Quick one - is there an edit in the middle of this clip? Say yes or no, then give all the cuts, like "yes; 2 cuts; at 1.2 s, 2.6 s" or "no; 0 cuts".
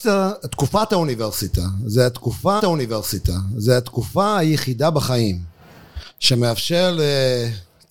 yes; 1 cut; at 2.6 s